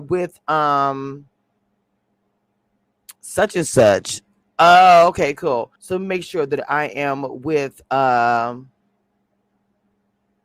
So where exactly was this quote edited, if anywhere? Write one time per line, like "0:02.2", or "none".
0:03.2
0:04.4
0:05.8